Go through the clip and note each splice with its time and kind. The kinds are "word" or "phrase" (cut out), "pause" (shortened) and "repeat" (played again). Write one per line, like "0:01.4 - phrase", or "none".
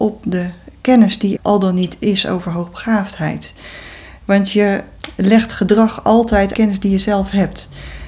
0:01.4 - word
0:06.5 - phrase